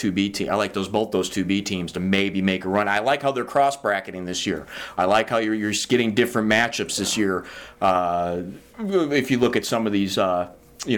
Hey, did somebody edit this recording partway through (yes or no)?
no